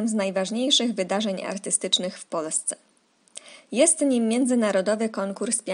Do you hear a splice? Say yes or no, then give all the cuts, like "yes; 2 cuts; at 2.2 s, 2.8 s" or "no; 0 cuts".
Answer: no; 0 cuts